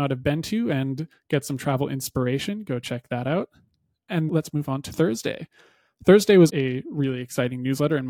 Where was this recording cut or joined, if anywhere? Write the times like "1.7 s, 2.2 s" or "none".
4.3 s, 6.5 s

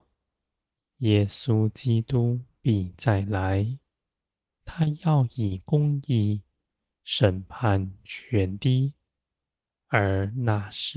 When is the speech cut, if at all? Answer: none

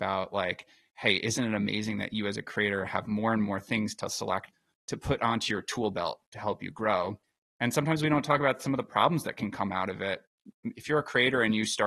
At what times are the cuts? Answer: none

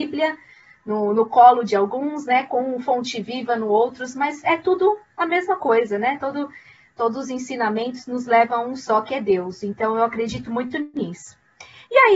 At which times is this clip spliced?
none

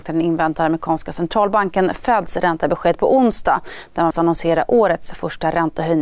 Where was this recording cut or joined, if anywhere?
4.1 s

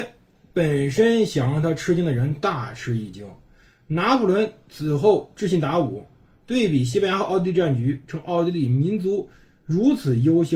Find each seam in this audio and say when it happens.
none

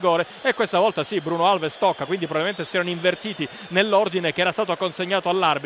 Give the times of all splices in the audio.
none

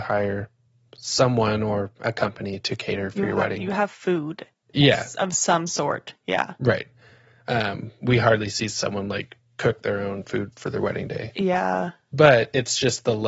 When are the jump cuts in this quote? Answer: none

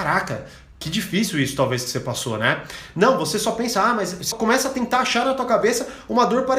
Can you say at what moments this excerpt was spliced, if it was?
4.3 s

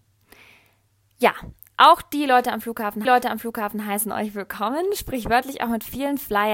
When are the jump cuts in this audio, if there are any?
3.0 s

